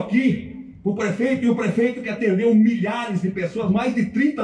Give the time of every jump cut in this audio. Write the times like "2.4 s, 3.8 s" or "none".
none